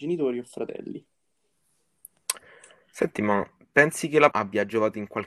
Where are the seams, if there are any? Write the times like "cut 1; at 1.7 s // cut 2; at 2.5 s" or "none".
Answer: cut 1; at 4.3 s